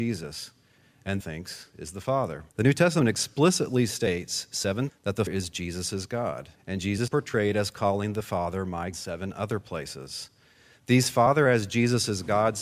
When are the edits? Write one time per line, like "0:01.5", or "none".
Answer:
0:01.2
0:02.5
0:04.9
0:05.3
0:06.6
0:07.1
0:08.9